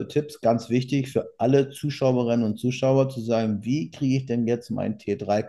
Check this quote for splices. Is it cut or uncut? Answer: uncut